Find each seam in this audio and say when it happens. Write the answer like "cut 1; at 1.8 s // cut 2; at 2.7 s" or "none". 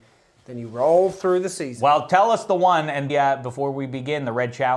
cut 1; at 3.1 s